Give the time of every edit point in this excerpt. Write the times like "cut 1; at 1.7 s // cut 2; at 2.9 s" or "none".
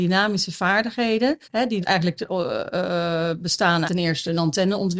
cut 1; at 1.4 s // cut 2; at 1.8 s // cut 3; at 3.8 s